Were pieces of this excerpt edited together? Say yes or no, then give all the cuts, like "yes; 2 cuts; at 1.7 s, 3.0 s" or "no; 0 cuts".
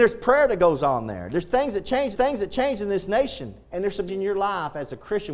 yes; 3 cuts; at 2.1 s, 3.6 s, 4.1 s